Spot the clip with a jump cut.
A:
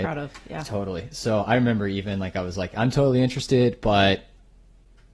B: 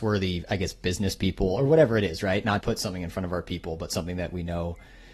B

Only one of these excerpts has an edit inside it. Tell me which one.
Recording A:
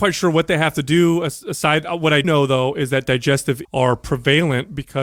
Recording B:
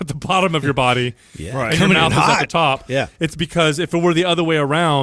A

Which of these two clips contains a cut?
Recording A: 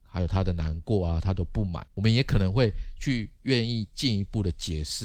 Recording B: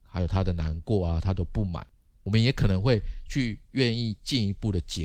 A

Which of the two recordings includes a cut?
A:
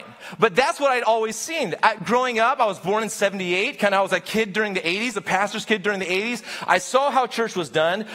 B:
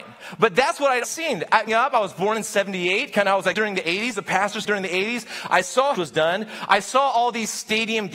B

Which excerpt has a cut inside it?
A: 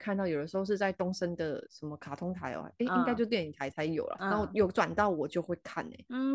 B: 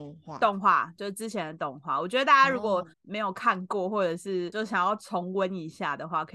B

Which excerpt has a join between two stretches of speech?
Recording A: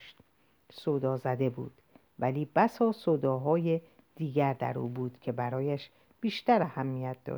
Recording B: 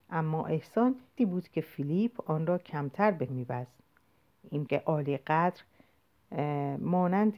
B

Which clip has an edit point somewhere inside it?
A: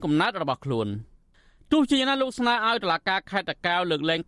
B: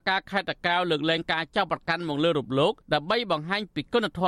B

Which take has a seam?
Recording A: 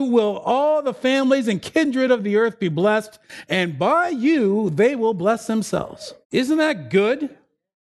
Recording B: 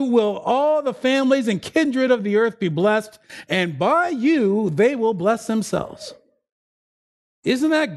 A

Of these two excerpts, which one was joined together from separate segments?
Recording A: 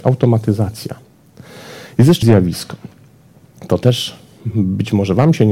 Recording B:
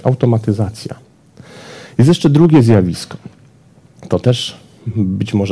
A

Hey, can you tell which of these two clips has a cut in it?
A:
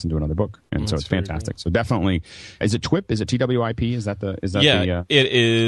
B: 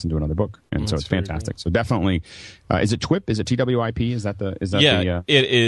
A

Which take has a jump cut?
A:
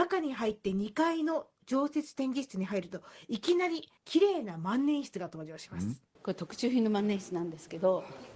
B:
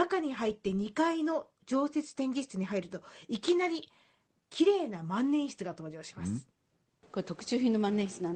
A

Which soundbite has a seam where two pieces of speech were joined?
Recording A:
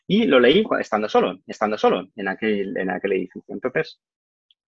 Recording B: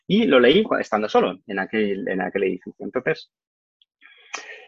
A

